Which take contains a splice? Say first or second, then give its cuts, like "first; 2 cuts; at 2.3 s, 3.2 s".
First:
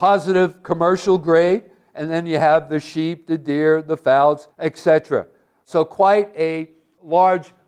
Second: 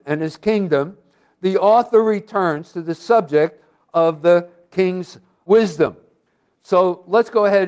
first; 1 cut; at 4.5 s